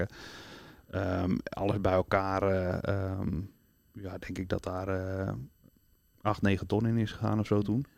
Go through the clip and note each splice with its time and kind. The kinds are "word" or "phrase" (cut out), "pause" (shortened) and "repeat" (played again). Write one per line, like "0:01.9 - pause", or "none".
none